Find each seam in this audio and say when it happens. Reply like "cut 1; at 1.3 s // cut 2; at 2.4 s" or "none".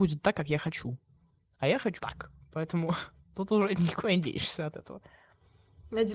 cut 1; at 2.0 s